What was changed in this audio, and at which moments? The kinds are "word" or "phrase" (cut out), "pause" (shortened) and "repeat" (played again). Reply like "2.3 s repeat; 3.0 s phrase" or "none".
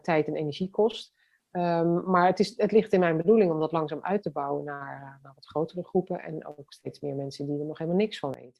none